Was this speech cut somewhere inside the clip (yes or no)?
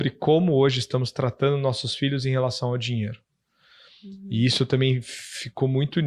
no